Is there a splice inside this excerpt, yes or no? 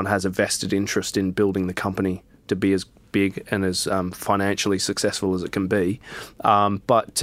no